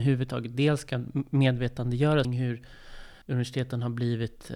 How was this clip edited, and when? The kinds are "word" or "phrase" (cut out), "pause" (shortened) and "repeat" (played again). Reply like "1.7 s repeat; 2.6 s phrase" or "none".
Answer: 2.2 s phrase; 3.2 s pause